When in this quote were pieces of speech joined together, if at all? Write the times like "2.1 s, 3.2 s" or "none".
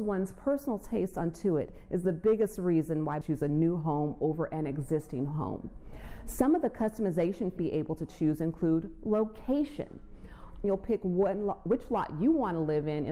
3.2 s, 7.6 s, 10.6 s